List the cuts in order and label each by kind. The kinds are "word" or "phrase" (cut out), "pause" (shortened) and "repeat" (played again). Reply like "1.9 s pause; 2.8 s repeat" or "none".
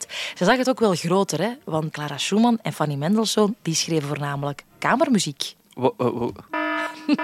1.9 s word